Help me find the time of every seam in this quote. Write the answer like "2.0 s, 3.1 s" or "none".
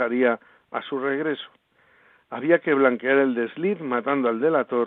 none